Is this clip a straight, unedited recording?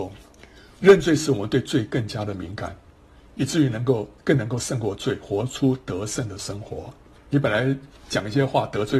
no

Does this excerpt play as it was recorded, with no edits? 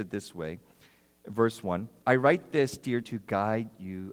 no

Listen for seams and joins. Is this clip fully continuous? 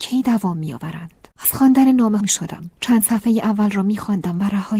no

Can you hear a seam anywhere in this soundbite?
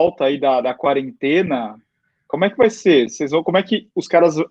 no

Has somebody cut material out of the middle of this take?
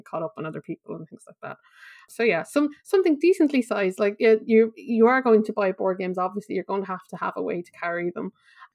no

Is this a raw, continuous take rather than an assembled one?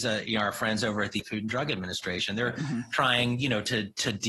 no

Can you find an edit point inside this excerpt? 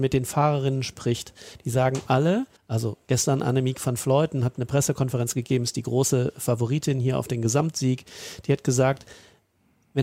yes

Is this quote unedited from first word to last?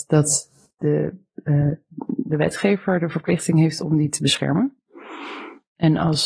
yes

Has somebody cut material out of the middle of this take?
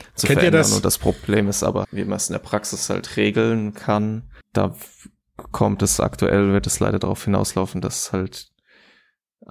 yes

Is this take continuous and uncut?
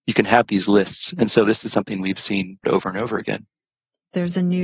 no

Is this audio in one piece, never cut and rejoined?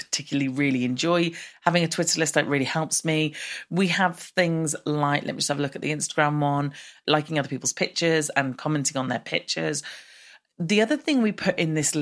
yes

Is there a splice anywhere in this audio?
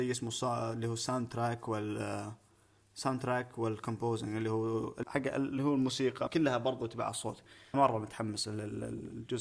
yes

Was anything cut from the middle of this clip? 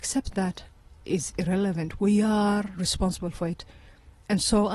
no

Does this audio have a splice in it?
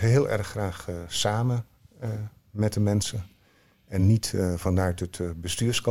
no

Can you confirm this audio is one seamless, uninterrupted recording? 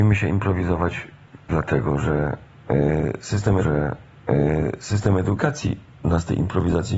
no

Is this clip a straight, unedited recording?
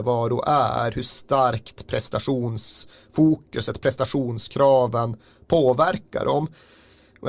yes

